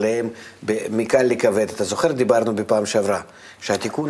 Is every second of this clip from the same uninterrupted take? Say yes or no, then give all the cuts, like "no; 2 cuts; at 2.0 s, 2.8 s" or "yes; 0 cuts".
yes; 0 cuts